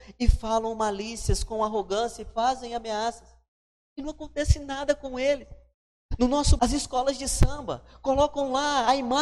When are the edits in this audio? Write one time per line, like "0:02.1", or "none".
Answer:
0:06.6